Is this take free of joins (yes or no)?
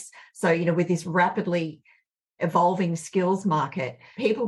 yes